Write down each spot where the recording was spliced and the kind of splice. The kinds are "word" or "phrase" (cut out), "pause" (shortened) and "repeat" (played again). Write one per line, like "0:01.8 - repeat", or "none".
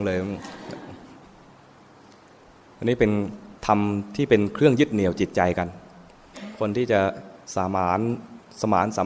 0:03.6 - pause
0:07.4 - pause